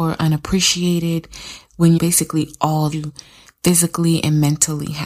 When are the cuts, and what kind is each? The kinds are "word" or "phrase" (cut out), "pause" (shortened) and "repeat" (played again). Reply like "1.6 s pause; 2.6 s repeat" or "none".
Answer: 2.0 s phrase; 2.9 s word